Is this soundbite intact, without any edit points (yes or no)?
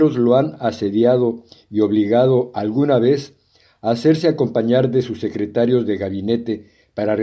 yes